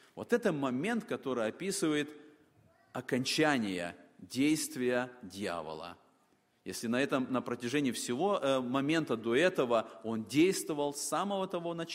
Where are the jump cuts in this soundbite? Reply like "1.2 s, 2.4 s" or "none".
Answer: none